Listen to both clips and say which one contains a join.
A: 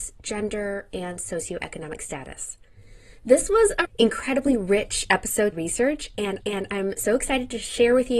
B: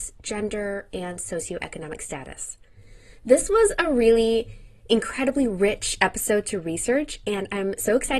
A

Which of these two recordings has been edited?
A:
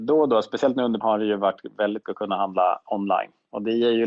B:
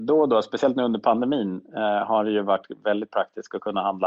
A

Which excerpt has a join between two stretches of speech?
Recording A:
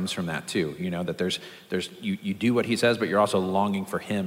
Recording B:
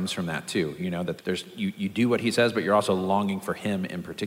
B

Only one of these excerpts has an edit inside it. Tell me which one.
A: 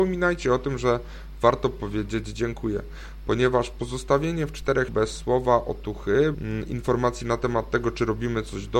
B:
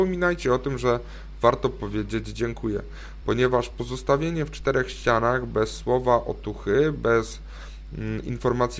A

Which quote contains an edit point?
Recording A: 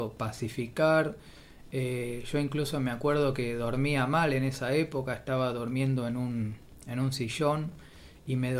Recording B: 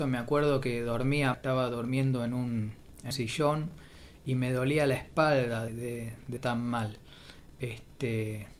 B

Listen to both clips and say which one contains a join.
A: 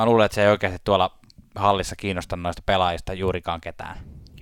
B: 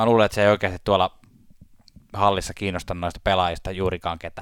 A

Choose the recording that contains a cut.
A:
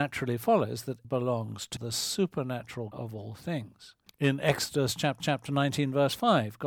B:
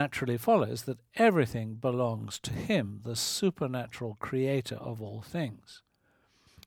A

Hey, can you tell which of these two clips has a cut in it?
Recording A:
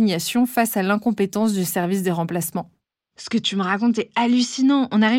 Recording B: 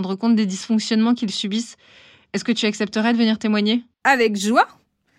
B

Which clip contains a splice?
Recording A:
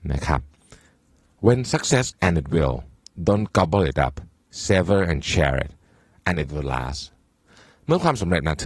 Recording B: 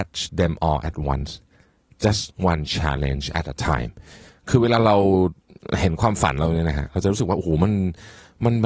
A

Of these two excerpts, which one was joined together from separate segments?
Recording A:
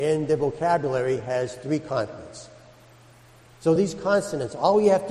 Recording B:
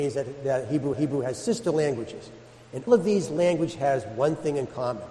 B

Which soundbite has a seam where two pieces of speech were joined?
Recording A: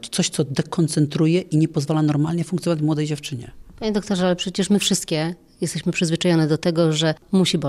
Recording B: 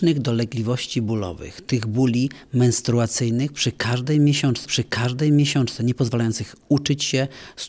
B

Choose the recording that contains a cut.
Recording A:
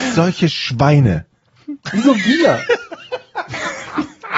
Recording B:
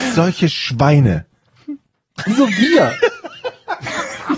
A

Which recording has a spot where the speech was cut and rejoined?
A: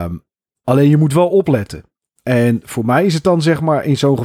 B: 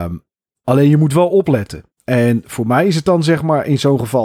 B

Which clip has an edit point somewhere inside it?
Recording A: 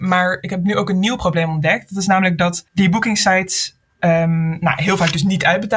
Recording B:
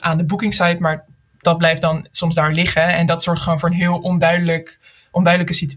A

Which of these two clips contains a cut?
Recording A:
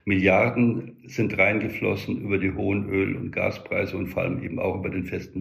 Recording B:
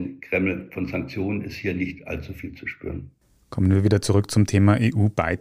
B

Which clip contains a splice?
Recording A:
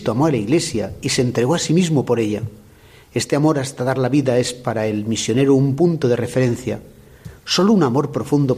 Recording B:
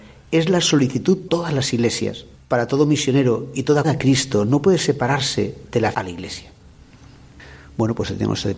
B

